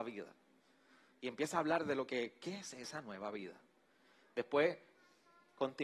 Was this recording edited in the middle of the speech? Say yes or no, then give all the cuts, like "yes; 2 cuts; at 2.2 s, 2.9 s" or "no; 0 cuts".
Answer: no; 0 cuts